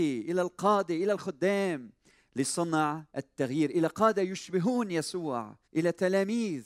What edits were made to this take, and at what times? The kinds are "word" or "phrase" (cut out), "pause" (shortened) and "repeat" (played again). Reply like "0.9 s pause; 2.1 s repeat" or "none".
3.1 s pause; 5.6 s pause

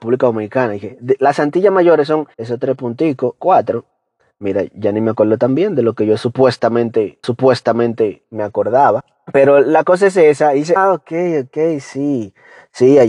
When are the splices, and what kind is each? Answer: 2.3 s pause; 3.4 s word; 7.2 s repeat; 10.8 s word

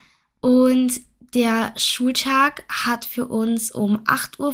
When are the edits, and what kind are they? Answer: none

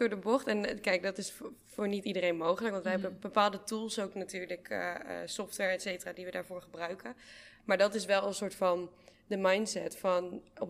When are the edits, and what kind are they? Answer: none

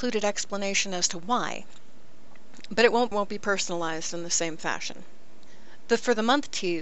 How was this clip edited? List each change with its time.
3.1 s phrase

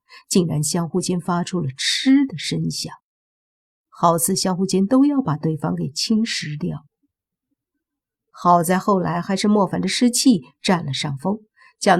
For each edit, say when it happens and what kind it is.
none

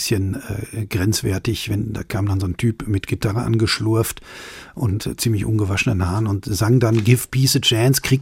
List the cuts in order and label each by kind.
none

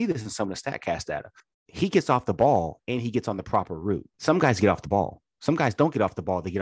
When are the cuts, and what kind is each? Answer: 1.4 s pause; 4.1 s pause

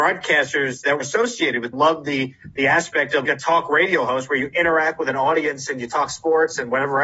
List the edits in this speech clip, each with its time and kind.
1.0 s word; 1.7 s phrase; 3.2 s phrase

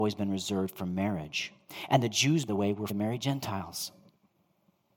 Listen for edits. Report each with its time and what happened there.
2.5 s word; 2.9 s word

